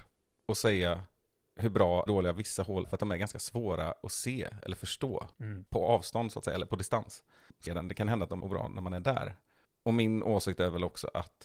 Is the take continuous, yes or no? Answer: no